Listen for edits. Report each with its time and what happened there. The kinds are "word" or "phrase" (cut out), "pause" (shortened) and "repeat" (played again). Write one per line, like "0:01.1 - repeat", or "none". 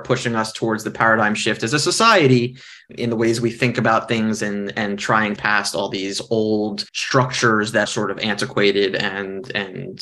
0:05.4 - word
0:06.9 - pause
0:07.9 - word